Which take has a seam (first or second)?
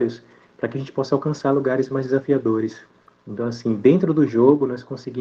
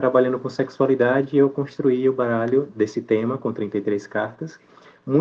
second